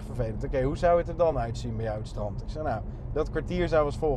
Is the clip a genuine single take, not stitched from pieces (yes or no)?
yes